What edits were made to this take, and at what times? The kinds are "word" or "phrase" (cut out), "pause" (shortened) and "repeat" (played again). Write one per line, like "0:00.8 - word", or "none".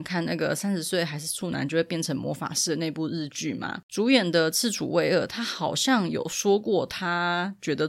0:03.8 - pause